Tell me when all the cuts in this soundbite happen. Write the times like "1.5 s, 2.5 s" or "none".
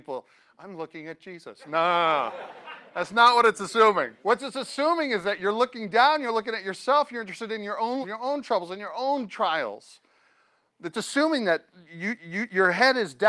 4.2 s, 8.0 s, 12.2 s